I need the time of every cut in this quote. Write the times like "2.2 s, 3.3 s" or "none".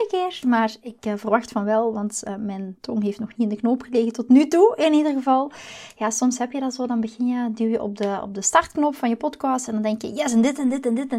none